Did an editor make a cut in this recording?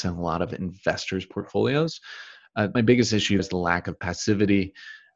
yes; 2 cuts; at 2.7 s, 3.4 s

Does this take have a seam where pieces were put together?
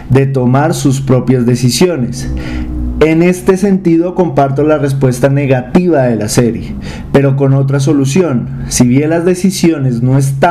no; 0 cuts

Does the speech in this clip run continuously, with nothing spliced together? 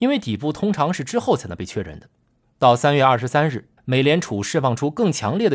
no; 2 cuts; at 2.4 s, 3.8 s

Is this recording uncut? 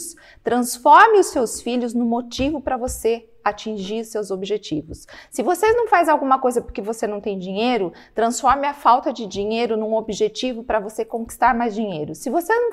yes; 0 cuts

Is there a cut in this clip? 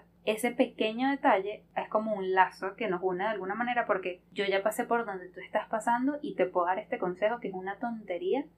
no; 0 cuts

